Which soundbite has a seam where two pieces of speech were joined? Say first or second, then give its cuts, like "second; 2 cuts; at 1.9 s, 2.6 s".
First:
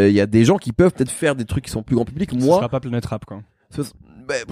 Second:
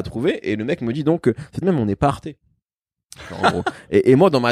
second; 1 cut; at 1.6 s